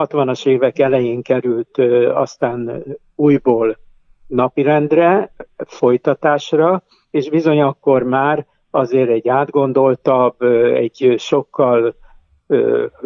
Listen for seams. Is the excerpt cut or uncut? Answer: uncut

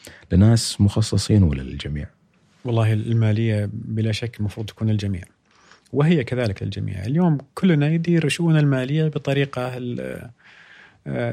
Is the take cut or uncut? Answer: uncut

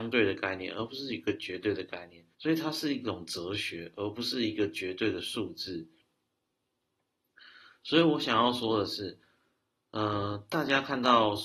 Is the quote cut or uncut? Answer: cut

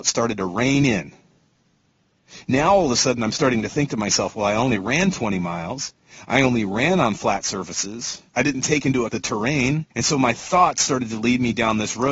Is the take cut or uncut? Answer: cut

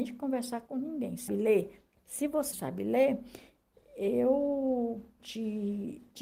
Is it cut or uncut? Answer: cut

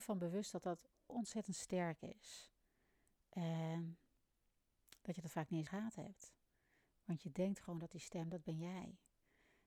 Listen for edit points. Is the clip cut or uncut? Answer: cut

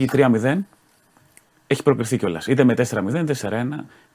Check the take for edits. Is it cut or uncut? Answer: cut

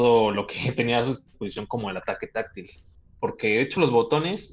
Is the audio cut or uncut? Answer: cut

